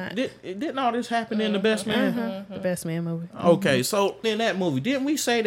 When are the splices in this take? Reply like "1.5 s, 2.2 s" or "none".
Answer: 4.2 s